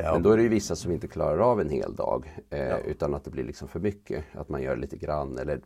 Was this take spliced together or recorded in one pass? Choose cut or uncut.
uncut